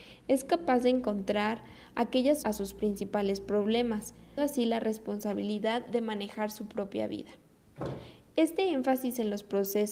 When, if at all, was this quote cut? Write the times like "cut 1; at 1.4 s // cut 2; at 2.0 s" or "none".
cut 1; at 2.4 s // cut 2; at 4.4 s

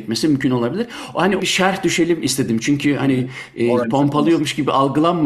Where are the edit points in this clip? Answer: cut 1; at 1.4 s // cut 2; at 3.8 s

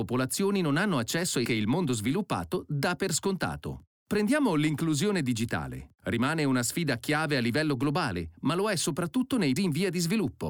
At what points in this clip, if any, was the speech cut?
cut 1; at 1.5 s // cut 2; at 9.6 s

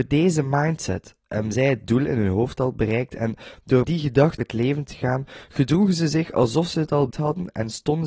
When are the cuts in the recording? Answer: cut 1; at 3.8 s // cut 2; at 4.4 s // cut 3; at 7.1 s

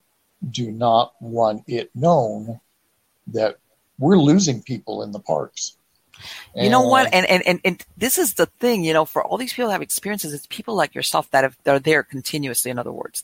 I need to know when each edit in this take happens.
none

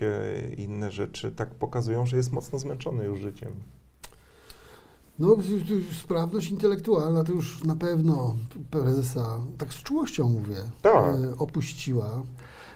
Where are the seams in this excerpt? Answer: none

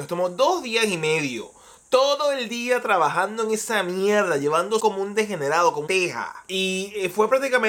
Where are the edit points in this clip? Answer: cut 1; at 4.8 s // cut 2; at 5.9 s

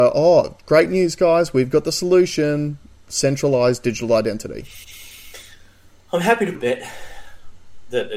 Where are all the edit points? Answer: cut 1; at 6.5 s

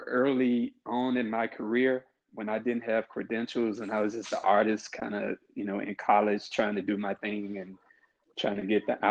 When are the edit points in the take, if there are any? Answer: none

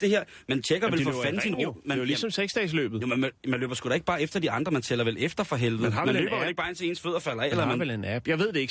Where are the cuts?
none

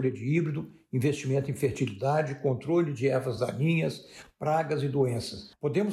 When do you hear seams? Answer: none

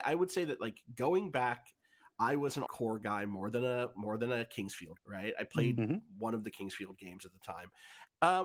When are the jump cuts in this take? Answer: cut 1; at 2.7 s // cut 2; at 5.0 s

